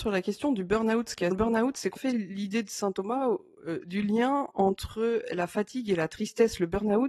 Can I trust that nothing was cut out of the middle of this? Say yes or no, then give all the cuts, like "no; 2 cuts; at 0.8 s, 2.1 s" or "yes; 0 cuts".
no; 2 cuts; at 1.3 s, 2.0 s